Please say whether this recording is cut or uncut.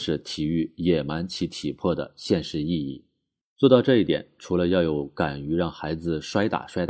uncut